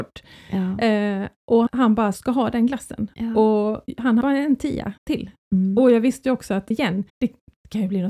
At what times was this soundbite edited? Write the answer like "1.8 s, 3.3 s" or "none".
1.7 s, 2.1 s, 4.2 s, 5.0 s, 6.7 s, 7.1 s